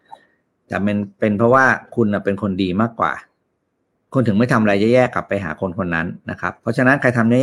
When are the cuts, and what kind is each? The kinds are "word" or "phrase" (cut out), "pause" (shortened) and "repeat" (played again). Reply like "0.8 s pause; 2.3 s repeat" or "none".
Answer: none